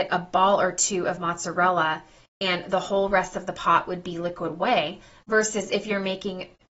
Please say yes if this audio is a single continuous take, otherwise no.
yes